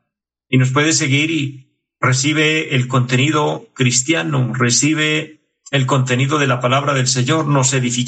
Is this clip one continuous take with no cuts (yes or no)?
yes